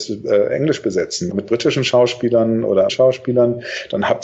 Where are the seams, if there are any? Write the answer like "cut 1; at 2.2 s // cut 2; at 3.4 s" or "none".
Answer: cut 1; at 1.3 s // cut 2; at 2.9 s